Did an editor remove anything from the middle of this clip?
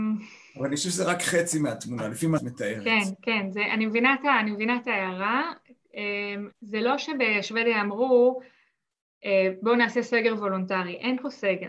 yes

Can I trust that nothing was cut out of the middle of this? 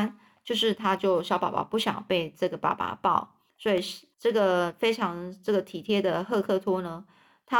no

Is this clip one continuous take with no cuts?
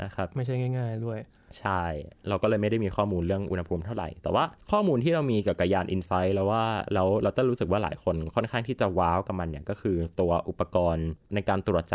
no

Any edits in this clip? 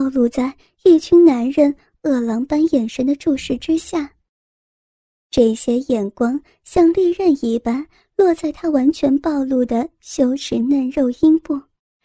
no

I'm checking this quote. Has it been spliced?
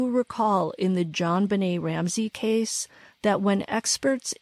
no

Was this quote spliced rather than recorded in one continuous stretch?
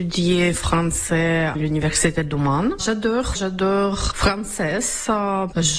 yes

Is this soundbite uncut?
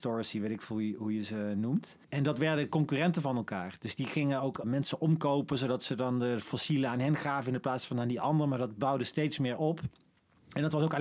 no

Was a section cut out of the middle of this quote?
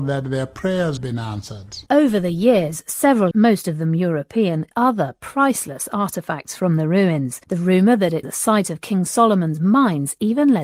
yes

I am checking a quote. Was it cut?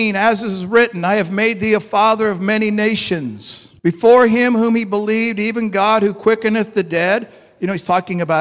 yes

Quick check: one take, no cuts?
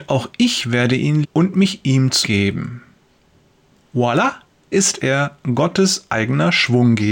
no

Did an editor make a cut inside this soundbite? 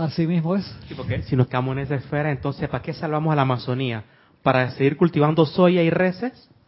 no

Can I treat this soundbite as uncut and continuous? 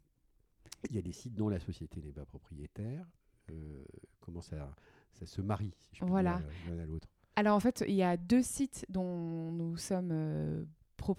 yes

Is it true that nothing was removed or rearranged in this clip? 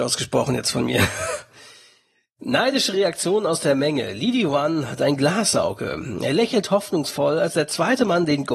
yes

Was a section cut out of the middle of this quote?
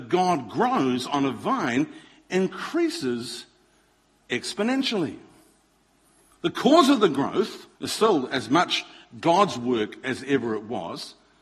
yes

